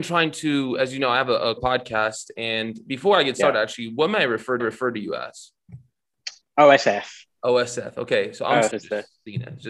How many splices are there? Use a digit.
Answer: 4